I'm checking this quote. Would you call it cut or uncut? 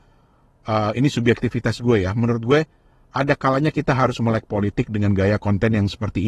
uncut